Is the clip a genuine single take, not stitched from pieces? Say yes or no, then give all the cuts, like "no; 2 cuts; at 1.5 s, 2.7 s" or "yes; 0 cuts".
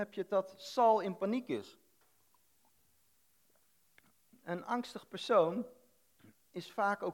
yes; 0 cuts